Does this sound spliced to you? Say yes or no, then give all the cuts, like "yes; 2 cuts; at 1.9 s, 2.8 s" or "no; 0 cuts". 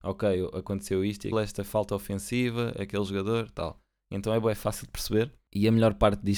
yes; 1 cut; at 1.3 s